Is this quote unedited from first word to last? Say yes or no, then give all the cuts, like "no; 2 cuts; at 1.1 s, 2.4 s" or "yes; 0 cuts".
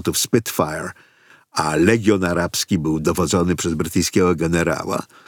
yes; 0 cuts